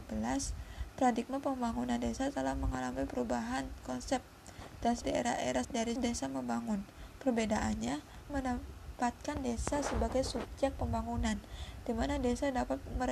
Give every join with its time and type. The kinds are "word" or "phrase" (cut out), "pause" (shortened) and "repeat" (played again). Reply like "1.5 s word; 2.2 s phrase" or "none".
5.0 s word; 5.6 s phrase; 6.0 s phrase; 8.3 s phrase